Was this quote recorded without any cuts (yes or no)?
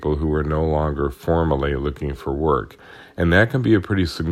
yes